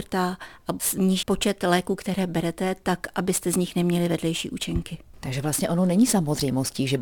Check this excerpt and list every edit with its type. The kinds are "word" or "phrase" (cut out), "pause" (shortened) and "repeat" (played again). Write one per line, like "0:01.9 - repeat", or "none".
0:01.2 - word